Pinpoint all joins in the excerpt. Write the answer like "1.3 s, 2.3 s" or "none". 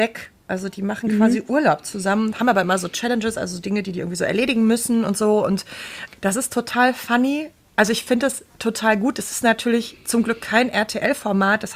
6.1 s

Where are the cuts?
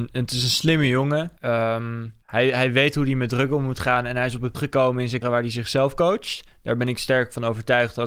1.4 s, 2.2 s, 4.5 s, 5.2 s

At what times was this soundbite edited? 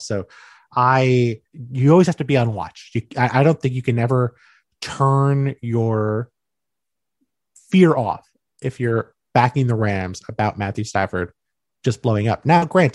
1.5 s

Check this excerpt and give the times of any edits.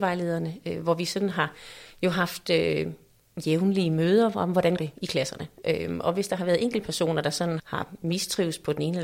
4.8 s, 7.6 s

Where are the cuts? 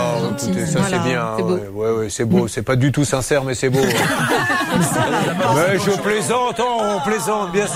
none

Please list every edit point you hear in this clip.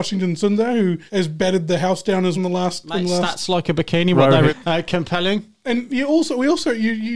1.1 s, 2.4 s, 4.5 s

